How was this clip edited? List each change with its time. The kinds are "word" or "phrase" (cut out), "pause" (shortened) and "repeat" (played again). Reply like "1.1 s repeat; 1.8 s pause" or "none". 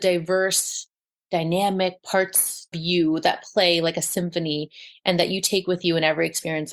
2.7 s word